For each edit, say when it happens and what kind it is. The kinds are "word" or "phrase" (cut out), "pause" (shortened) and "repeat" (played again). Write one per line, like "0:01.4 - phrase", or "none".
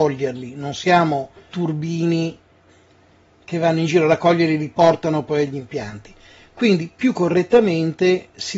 0:01.5 - word